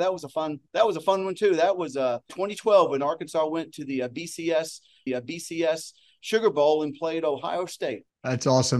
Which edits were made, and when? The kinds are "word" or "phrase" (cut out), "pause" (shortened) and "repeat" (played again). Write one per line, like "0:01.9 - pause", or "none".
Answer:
0:02.3 - word
0:05.1 - repeat